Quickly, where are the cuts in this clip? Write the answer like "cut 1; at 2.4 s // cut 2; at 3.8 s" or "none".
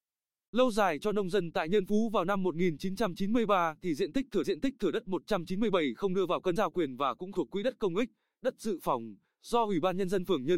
cut 1; at 4.4 s // cut 2; at 6.6 s // cut 3; at 7.3 s

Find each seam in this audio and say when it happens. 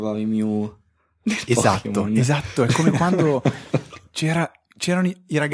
none

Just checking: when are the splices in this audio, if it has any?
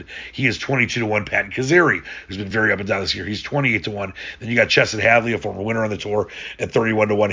none

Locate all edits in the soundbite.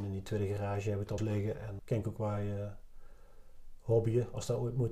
cut 1; at 1.2 s // cut 2; at 1.8 s

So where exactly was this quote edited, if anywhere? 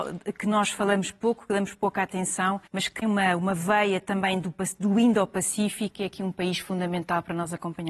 cut 1; at 2.7 s // cut 2; at 3.0 s

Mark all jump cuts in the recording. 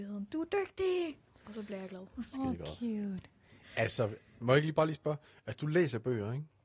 cut 1; at 1.3 s

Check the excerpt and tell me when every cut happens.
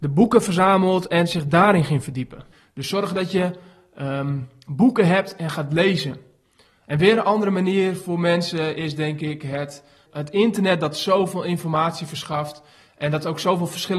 none

